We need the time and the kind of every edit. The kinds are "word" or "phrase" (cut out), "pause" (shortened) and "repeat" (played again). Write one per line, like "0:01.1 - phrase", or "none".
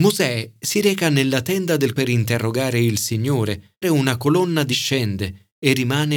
0:01.9 - word
0:03.8 - word
0:04.7 - word